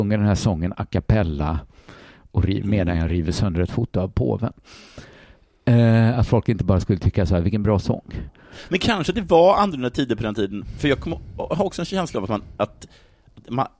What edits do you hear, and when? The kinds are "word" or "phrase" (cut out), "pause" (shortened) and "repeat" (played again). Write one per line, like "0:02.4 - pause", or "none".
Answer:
none